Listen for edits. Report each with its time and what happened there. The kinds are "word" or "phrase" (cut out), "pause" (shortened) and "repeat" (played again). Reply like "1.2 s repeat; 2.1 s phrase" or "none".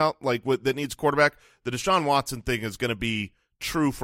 none